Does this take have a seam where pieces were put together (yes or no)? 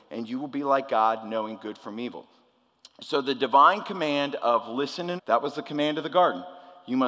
yes